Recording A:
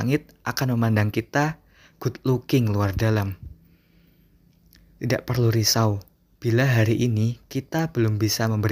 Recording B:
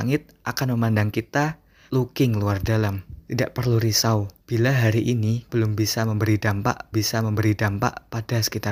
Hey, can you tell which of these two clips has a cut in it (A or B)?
B